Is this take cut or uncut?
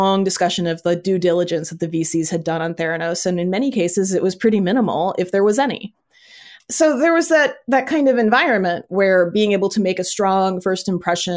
uncut